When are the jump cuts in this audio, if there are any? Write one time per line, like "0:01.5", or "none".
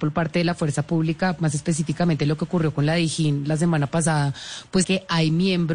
0:04.8